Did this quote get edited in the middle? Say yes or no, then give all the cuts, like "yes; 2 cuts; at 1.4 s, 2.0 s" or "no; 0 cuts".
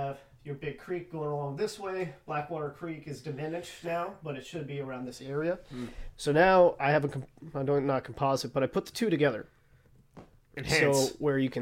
no; 0 cuts